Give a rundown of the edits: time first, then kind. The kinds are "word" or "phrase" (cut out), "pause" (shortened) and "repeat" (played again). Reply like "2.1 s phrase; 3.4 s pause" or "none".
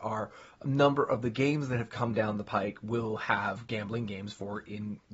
none

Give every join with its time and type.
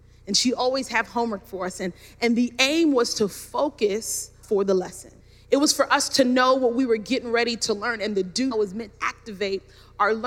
4.4 s word; 5.2 s pause; 8.5 s word; 8.9 s word

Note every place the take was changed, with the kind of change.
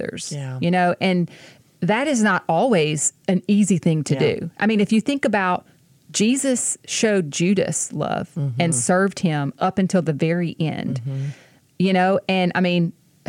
none

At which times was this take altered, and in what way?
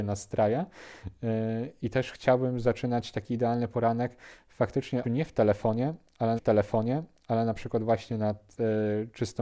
5.0 s phrase; 6.4 s repeat

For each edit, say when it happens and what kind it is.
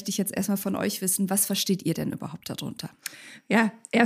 none

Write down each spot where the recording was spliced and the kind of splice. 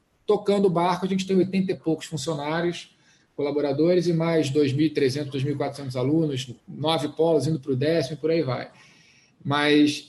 6.6 s pause

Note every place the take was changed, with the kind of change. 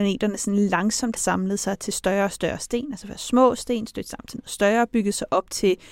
1.2 s word

